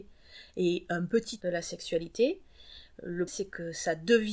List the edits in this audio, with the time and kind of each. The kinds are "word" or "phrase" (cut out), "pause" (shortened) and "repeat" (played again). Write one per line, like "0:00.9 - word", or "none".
0:01.4 - word
0:03.3 - word